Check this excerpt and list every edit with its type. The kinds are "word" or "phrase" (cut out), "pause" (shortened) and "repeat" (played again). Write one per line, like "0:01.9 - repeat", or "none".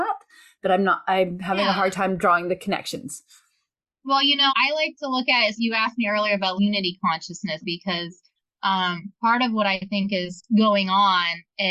0:04.5 - word
0:05.6 - word
0:06.6 - word
0:07.6 - word
0:09.2 - pause
0:10.5 - pause

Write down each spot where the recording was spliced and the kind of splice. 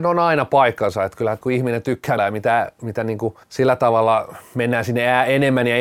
0:01.4 - word
0:02.2 - word
0:03.4 - pause

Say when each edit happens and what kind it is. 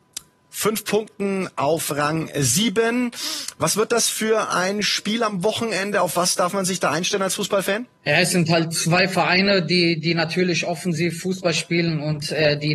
0:08.0 - pause

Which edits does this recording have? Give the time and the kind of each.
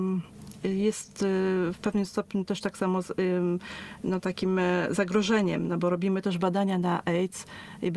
none

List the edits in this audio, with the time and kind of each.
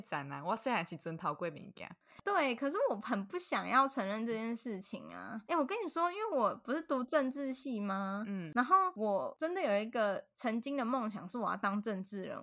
0:05.4 - pause

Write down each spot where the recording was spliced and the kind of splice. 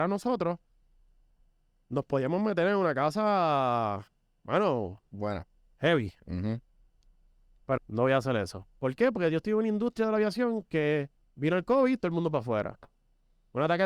0:07.8 - word
0:11.2 - pause

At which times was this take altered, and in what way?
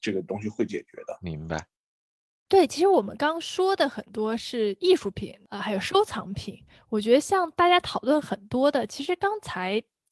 none

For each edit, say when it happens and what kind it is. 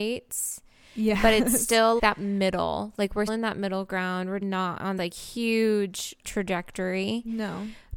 0:02.0 - word
0:03.3 - word
0:04.4 - word
0:05.0 - word
0:06.2 - word

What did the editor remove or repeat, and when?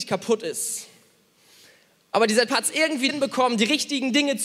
0:02.5 - word
0:03.1 - word

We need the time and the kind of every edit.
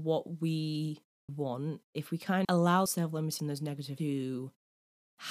0:01.3 - word
0:02.4 - word
0:02.9 - word
0:03.4 - word
0:04.0 - word

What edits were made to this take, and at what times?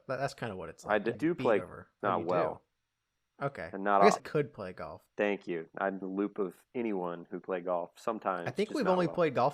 0:01.1 - word
0:01.6 - word
0:02.0 - word
0:04.2 - word
0:05.1 - word
0:06.0 - word
0:07.4 - word

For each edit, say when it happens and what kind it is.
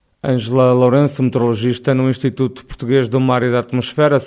none

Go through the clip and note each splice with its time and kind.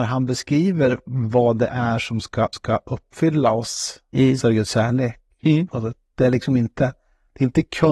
0:02.5 - repeat

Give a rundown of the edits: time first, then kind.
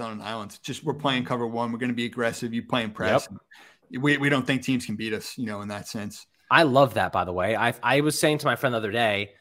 none

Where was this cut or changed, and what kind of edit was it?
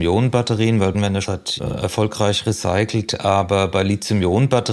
0:00.9 - word
0:01.2 - word
0:01.6 - word

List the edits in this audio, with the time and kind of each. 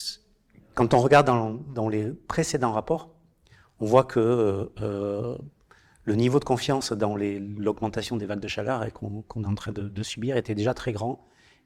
none

